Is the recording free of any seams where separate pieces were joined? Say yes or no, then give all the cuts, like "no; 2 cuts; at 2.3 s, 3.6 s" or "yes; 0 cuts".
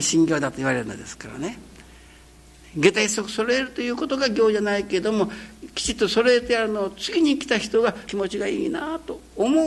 no; 1 cut; at 8.1 s